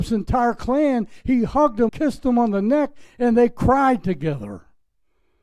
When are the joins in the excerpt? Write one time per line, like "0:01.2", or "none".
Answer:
0:01.9